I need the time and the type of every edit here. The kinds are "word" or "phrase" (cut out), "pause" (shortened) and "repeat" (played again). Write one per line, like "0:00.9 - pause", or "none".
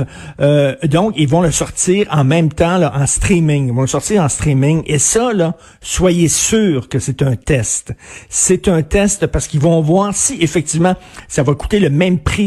none